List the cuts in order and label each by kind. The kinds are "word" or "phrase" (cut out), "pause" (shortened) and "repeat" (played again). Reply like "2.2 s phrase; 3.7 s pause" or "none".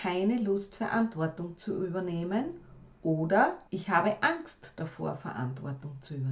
3.7 s pause